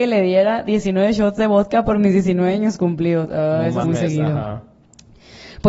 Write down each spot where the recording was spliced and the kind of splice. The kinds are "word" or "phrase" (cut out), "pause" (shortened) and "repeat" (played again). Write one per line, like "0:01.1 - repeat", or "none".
0:03.8 - phrase